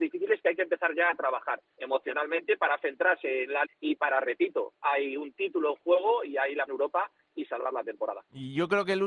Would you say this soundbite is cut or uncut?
cut